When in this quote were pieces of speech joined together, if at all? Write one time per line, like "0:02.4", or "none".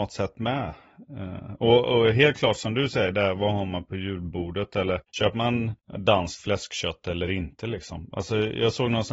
none